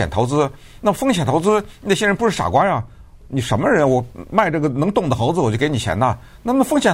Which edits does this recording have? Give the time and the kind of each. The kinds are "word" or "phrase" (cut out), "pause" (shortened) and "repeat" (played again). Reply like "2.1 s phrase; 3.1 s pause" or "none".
none